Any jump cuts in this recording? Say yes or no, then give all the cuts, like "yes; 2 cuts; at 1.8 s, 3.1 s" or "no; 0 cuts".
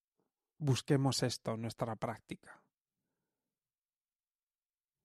no; 0 cuts